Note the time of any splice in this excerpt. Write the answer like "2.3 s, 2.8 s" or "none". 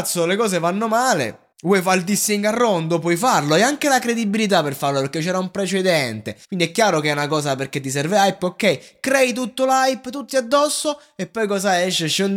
1.5 s, 6.4 s